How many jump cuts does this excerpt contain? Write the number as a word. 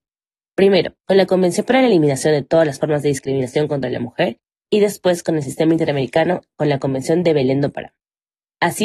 one